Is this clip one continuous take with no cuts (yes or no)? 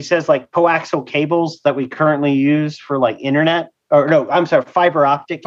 yes